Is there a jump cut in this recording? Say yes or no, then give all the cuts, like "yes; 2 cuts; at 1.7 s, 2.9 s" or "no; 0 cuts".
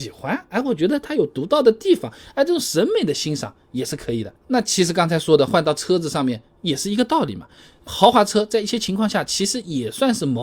yes; 1 cut; at 7.9 s